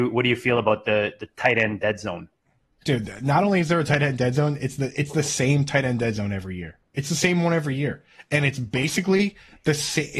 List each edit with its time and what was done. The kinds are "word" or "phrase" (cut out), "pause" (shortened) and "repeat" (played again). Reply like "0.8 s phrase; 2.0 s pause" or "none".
none

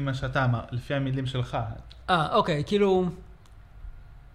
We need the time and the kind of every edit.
none

